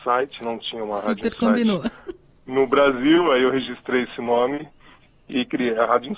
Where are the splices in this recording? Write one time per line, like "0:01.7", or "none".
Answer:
none